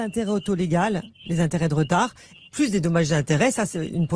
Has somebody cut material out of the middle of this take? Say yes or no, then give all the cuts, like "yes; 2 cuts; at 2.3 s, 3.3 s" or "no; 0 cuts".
no; 0 cuts